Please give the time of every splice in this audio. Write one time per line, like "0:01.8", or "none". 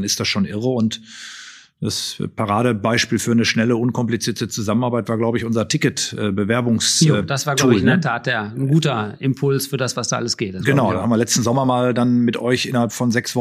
none